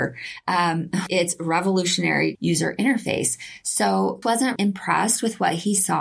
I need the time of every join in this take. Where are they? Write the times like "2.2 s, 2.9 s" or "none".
1.1 s, 2.3 s, 4.2 s, 4.6 s